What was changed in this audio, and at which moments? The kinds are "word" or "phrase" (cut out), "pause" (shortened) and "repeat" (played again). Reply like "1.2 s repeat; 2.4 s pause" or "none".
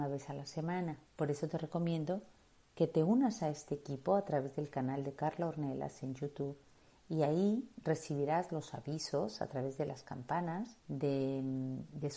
1.1 s pause; 10.8 s pause